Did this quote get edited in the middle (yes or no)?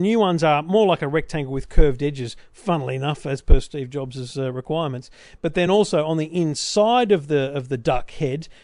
no